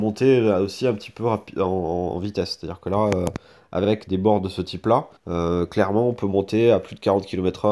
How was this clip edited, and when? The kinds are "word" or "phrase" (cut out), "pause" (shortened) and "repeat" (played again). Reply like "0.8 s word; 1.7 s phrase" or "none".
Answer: 4.1 s word; 5.2 s pause